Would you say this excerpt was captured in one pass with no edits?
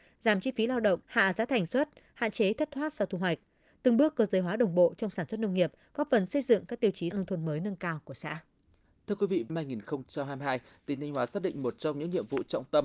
no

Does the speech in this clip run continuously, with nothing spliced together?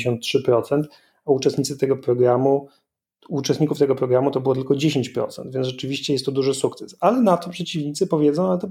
yes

